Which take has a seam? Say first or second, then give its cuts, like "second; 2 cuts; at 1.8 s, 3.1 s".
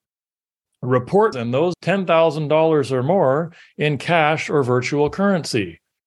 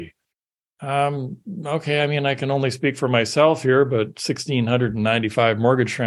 first; 2 cuts; at 1.3 s, 1.7 s